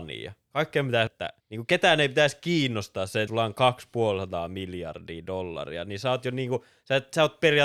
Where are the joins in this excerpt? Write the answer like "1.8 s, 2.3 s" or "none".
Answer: 1.1 s, 1.4 s, 3.3 s